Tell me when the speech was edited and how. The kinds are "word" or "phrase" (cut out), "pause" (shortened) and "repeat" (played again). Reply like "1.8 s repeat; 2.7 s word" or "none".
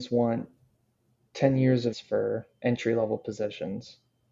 1.9 s word